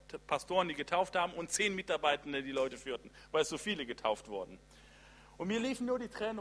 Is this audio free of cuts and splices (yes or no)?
yes